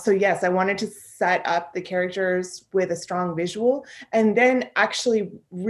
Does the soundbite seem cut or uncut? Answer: uncut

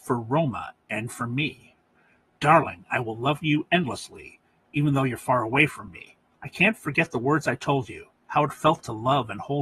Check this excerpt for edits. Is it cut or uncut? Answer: uncut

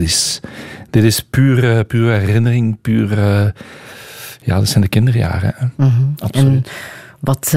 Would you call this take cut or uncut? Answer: uncut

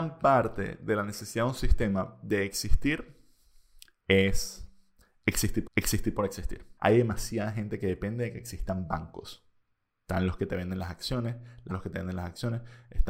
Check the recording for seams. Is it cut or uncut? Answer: cut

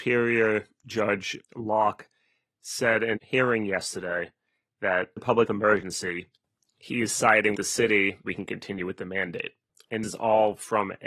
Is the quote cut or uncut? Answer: cut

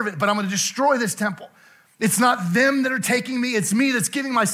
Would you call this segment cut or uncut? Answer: uncut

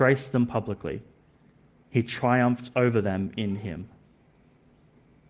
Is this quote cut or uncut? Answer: uncut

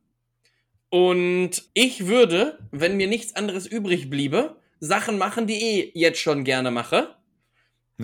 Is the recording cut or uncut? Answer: cut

